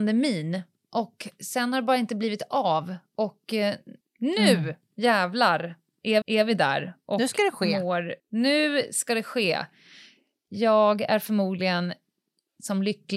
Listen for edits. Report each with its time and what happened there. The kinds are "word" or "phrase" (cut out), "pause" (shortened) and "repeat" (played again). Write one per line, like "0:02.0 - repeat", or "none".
0:04.0 - word
0:06.2 - repeat
0:08.2 - pause